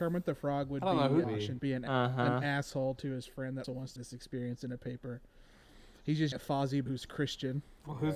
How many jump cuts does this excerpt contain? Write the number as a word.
six